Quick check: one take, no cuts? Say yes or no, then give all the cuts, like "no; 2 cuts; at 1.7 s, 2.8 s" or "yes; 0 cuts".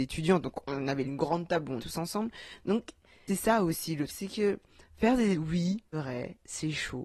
no; 6 cuts; at 1.0 s, 1.8 s, 3.3 s, 4.1 s, 5.3 s, 5.9 s